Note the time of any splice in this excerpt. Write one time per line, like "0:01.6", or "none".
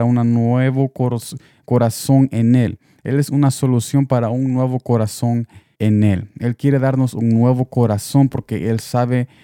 0:05.7